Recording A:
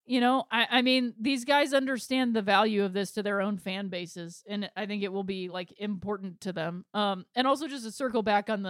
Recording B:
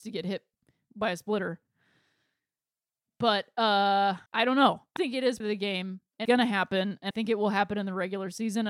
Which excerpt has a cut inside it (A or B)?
B